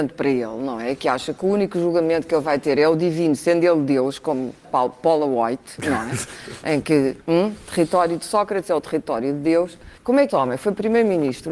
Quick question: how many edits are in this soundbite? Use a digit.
4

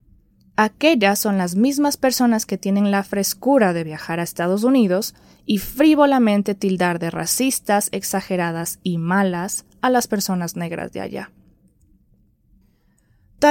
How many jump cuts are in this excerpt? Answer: 0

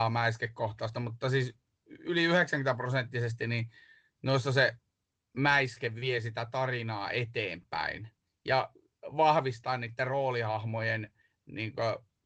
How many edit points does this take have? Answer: 0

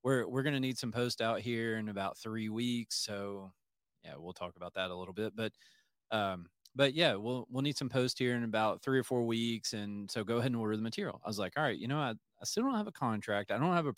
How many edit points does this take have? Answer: 0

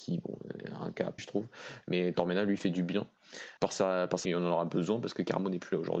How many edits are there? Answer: 4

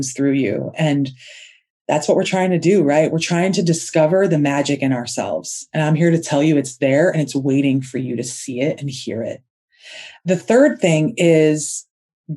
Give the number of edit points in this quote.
0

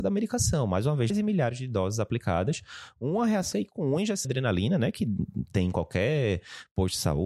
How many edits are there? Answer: 3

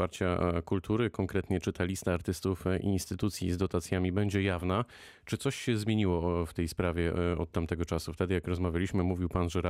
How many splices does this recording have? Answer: 0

